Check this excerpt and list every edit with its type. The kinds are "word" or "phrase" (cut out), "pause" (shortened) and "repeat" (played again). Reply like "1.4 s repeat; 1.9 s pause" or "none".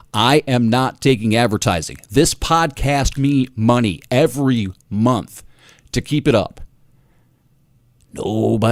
3.1 s word